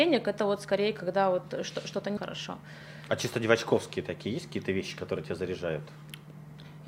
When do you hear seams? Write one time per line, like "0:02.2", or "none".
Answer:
0:02.2